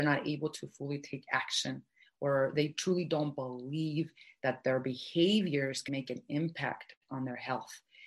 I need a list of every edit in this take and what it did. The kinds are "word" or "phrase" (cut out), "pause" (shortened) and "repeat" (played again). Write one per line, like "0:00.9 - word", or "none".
0:05.9 - word